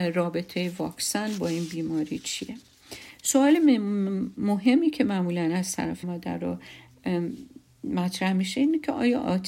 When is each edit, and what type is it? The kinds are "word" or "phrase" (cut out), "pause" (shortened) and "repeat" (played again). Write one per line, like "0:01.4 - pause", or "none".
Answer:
0:06.0 - word